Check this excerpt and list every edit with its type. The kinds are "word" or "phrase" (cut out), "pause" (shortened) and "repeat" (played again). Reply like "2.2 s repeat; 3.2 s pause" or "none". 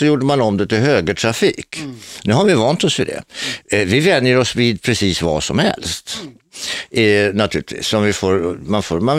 none